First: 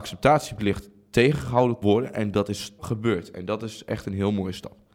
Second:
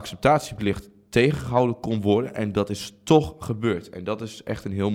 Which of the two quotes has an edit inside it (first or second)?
first